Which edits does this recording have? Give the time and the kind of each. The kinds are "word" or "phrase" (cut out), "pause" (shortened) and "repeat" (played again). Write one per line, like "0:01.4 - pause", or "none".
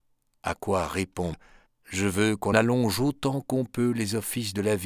0:01.3 - word
0:01.7 - pause
0:02.5 - phrase